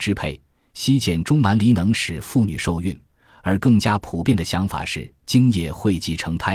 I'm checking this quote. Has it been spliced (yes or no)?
no